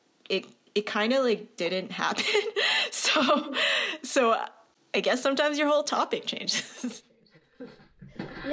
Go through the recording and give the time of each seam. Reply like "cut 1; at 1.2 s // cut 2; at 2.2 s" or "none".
none